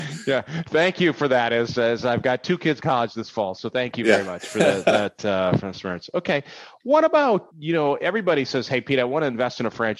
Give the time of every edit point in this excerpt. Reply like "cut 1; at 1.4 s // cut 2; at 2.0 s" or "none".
cut 1; at 2.8 s // cut 2; at 7.5 s